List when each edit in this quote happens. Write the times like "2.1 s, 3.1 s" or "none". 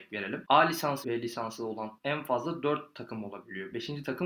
1.0 s, 2.0 s

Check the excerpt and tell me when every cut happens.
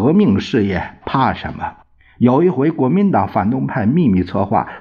1.8 s

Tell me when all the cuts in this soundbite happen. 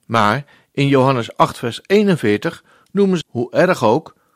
3.2 s

